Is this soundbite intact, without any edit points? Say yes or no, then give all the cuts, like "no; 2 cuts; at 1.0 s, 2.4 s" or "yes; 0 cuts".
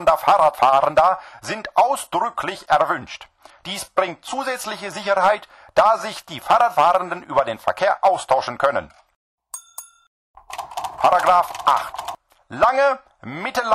yes; 0 cuts